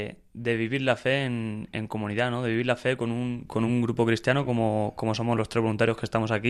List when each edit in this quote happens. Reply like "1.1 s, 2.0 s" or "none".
none